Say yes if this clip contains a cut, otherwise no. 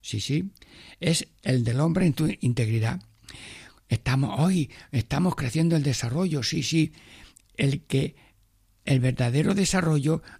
no